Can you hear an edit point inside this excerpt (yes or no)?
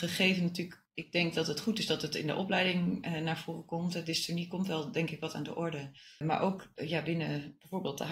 no